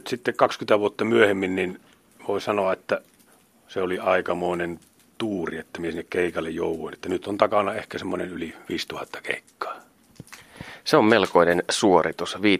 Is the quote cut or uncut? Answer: cut